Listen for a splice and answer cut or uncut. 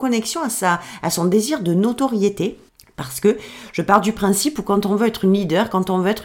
cut